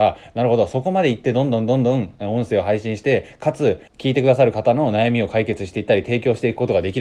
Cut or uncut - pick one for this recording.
cut